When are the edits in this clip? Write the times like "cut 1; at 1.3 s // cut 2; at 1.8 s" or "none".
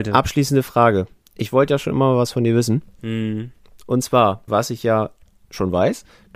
cut 1; at 4.5 s